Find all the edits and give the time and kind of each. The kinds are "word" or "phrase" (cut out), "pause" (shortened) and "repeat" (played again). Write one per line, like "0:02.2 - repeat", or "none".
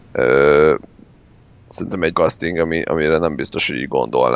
0:02.1 - word

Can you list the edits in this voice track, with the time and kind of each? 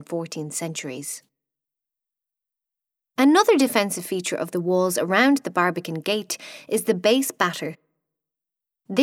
none

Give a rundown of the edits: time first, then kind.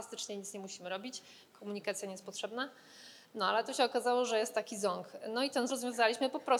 0:05.7 - word

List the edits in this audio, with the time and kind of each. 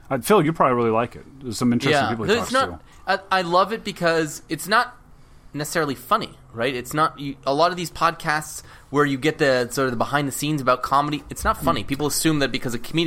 none

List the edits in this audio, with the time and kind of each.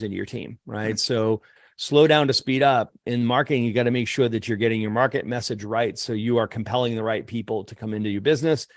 none

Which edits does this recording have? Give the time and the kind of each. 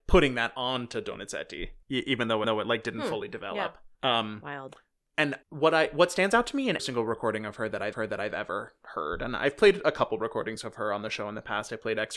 0:01.8 - pause
0:02.4 - repeat
0:03.9 - pause
0:05.4 - pause
0:06.8 - word
0:07.9 - repeat

